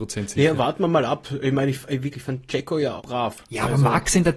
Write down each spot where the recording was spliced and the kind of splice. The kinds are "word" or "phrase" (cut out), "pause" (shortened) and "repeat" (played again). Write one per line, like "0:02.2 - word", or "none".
0:02.1 - word
0:03.0 - word